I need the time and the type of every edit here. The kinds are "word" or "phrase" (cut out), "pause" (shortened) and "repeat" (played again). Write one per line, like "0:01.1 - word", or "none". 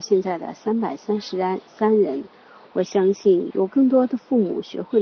none